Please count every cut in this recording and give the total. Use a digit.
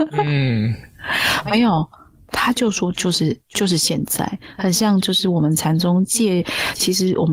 0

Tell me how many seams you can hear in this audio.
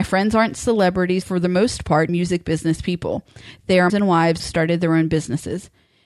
4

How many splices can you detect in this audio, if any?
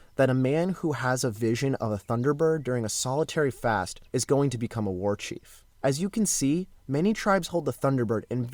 3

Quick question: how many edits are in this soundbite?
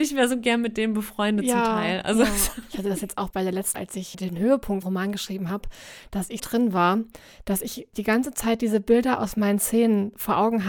4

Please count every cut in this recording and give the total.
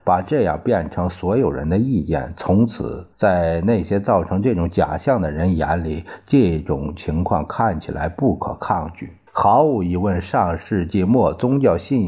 2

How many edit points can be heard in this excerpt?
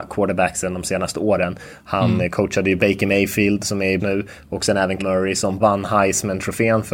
4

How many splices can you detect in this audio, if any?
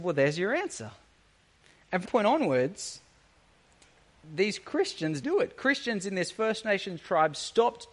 2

